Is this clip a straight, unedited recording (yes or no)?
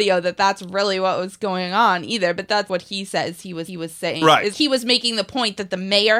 no